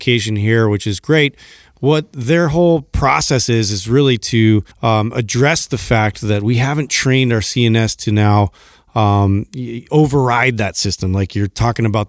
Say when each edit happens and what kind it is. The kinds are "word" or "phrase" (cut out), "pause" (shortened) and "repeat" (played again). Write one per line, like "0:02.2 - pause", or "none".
0:04.7 - pause